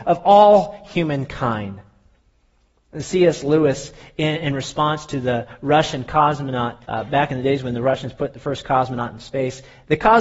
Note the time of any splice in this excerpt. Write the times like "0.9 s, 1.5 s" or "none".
6.8 s